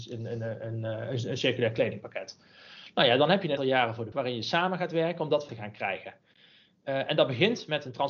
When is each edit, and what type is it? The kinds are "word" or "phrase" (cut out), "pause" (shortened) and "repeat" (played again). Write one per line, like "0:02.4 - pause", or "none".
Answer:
0:03.6 - word
0:04.1 - word
0:05.5 - word